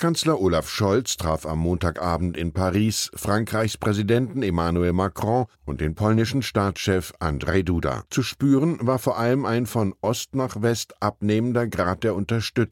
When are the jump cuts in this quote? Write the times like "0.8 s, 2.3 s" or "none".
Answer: 5.5 s, 8.1 s